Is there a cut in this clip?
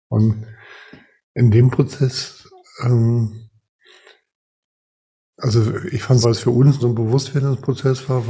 yes; 2 cuts; at 6.2 s, 6.8 s

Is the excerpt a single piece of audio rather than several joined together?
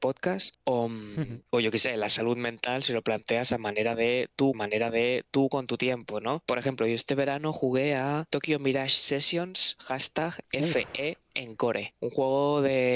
no; 1 cut; at 4.5 s

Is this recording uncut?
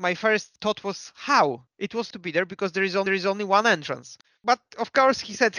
no; 4 cuts; at 1.7 s, 2.1 s, 3.1 s, 4.2 s

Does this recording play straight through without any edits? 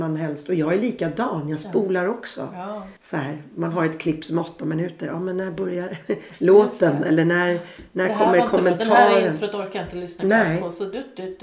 no; 1 cut; at 3.0 s

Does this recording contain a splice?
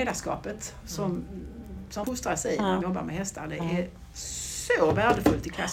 yes; 2 cuts; at 2.0 s, 2.8 s

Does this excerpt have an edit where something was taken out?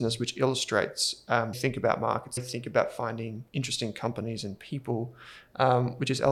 yes; 3 cuts; at 1.5 s, 2.4 s, 3.5 s

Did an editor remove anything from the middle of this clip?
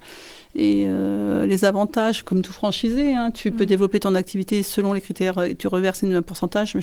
no; 0 cuts

